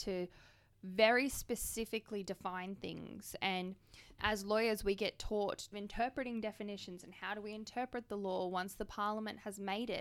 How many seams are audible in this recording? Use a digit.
2